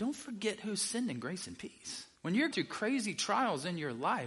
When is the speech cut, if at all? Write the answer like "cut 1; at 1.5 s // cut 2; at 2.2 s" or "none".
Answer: cut 1; at 2.2 s // cut 2; at 2.5 s